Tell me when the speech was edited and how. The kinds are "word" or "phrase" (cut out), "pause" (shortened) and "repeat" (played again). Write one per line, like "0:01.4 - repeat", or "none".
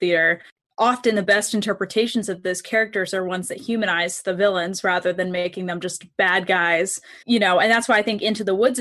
0:07.2 - pause